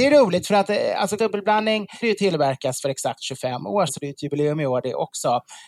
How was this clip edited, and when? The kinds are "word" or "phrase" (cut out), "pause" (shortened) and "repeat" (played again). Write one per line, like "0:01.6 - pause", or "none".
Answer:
0:01.2 - word
0:02.0 - word
0:03.9 - word